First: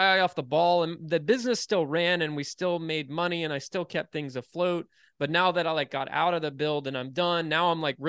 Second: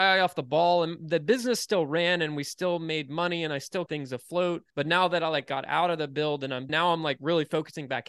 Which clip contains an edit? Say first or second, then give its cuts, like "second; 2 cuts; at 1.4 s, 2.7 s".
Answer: second; 3 cuts; at 3.9 s, 4.7 s, 6.7 s